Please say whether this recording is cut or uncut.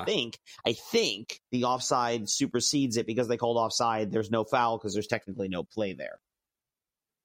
cut